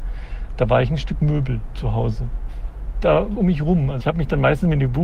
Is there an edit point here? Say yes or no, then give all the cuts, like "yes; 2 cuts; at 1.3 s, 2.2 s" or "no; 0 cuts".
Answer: yes; 2 cuts; at 3.3 s, 4.0 s